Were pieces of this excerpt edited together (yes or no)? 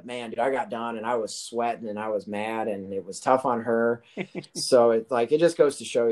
no